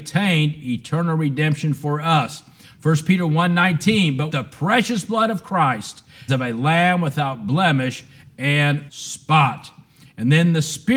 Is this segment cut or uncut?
cut